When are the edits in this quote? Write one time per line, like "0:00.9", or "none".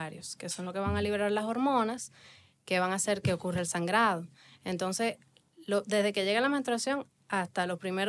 none